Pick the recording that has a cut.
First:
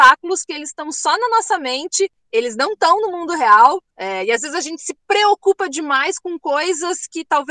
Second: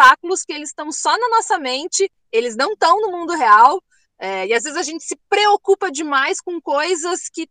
first; 1 cut; at 3.9 s

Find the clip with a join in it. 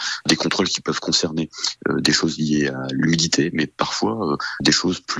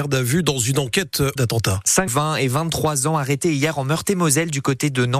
second; 2 cuts; at 1.4 s, 2.1 s

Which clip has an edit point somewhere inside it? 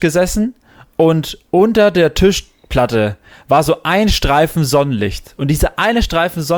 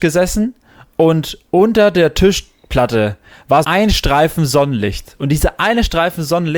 second; 1 cut; at 3.6 s

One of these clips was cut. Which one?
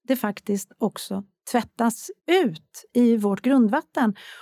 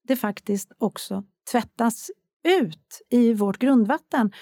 first; 1 cut; at 2.2 s

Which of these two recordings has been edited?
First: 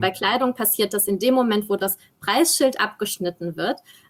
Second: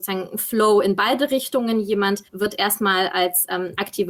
second; 1 cut; at 2.3 s

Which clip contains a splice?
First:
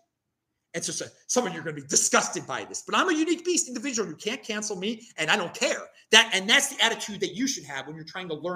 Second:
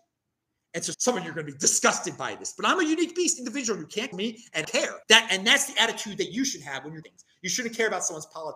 second; 5 cuts; at 0.9 s, 4.1 s, 4.6 s, 5.0 s, 7.0 s

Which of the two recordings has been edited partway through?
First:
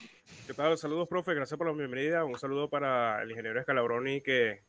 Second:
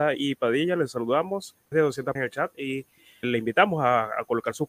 second; 3 cuts; at 1.7 s, 2.1 s, 3.2 s

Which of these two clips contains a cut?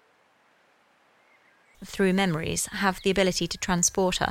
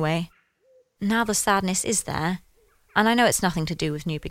first; 1 cut; at 1.7 s

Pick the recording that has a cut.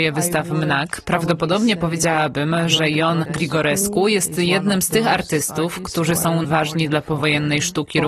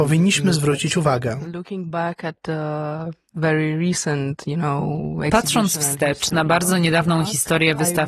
first; 1 cut; at 6.4 s

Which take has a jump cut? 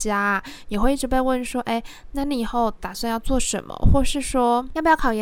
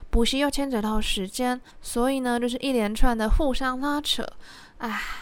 second; 1 cut; at 1.7 s

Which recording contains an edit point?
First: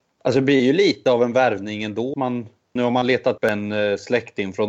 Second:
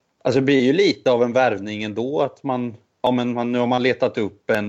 first; 3 cuts; at 2.1 s, 2.8 s, 3.4 s

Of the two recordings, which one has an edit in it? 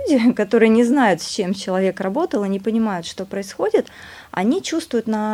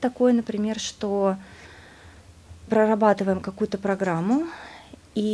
second; 1 cut; at 2.7 s

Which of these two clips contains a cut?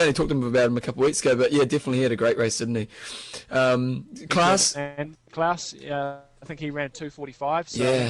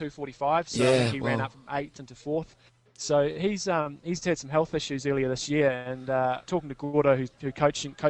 first; 1 cut; at 5.3 s

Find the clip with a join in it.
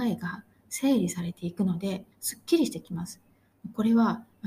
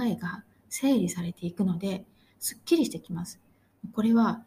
first; 1 cut; at 2.1 s

